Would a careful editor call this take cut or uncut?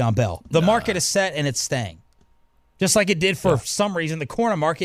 uncut